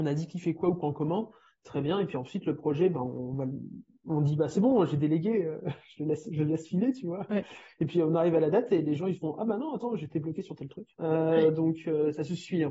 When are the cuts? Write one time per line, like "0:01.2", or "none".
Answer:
0:10.9